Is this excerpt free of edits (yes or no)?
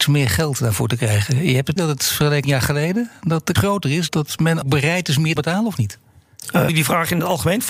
no